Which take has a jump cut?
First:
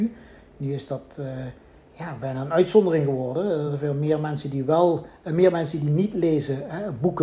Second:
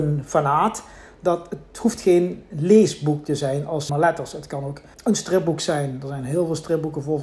second; 2 cuts; at 3.9 s, 4.9 s

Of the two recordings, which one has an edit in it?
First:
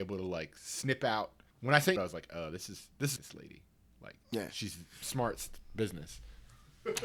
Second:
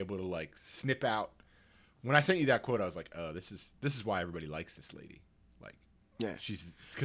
first; 5 cuts; at 1.5 s, 2.0 s, 3.2 s, 4.2 s, 5.0 s

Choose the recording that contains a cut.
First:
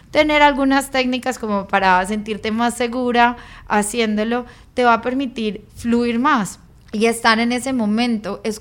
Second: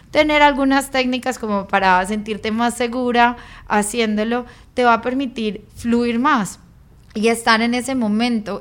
first; 1 cut; at 6.7 s

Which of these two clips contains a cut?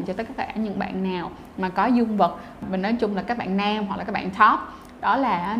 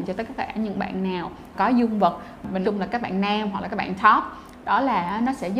second; 2 cuts; at 1.5 s, 2.6 s

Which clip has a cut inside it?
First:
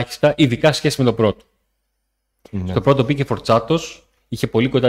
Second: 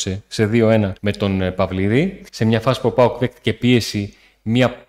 second; 2 cuts; at 1.0 s, 2.3 s

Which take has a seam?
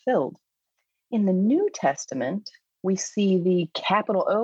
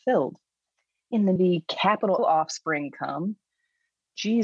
second; 2 cuts; at 1.4 s, 2.2 s

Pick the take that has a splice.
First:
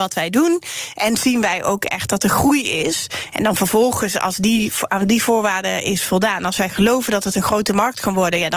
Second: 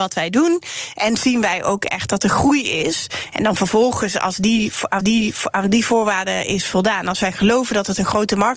second; 1 cut; at 5.0 s

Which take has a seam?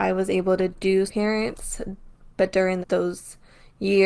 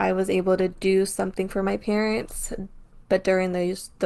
first; 2 cuts; at 1.1 s, 2.8 s

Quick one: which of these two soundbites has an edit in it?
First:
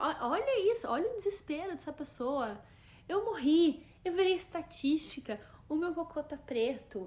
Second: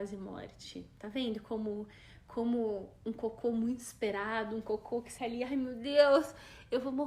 second; 1 cut; at 5.2 s

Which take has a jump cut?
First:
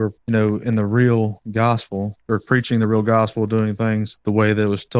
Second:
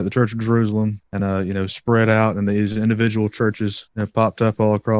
second; 1 cut; at 1.2 s

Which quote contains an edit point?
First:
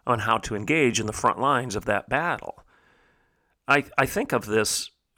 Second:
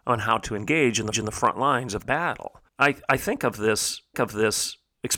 second; 4 cuts; at 1.1 s, 2.0 s, 2.7 s, 4.1 s

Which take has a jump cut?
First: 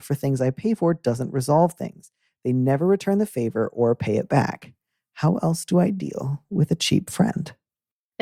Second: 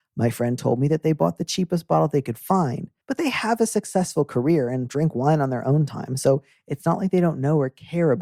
second; 1 cut; at 3.0 s

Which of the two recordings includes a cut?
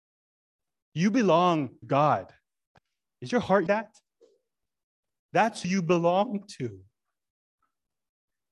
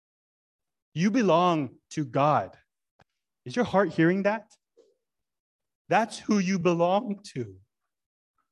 first; 3 cuts; at 1.8 s, 3.7 s, 5.6 s

